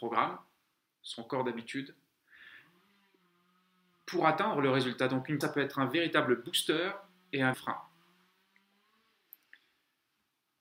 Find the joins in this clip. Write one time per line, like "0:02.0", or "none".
0:05.4
0:07.5